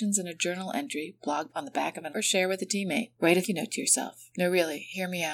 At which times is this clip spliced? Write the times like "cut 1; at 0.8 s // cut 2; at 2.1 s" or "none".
cut 1; at 1.5 s // cut 2; at 2.1 s // cut 3; at 3.4 s